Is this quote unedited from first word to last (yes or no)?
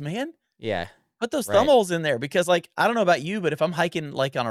yes